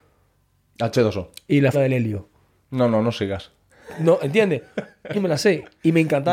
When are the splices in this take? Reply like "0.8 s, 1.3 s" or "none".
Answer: 1.7 s, 5.1 s